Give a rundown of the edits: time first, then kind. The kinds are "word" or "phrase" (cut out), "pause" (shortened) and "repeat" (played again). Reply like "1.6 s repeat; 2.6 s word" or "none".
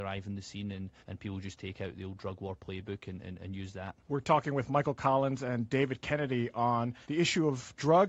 1.0 s pause; 4.0 s pause; 7.0 s pause